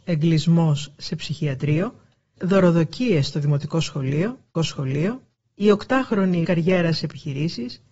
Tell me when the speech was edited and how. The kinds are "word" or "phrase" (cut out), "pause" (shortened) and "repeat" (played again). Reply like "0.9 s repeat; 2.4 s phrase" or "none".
2.4 s word; 4.5 s repeat; 6.4 s word; 7.0 s word